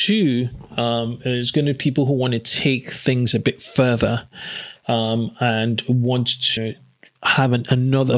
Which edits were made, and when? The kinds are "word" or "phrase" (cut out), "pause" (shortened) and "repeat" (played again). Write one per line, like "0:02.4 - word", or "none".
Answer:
0:06.6 - word